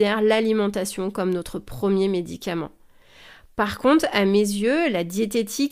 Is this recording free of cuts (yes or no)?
yes